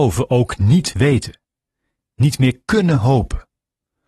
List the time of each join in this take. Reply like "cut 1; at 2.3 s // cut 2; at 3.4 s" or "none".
none